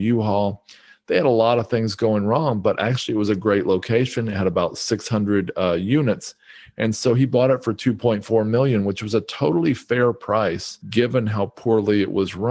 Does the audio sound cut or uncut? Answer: cut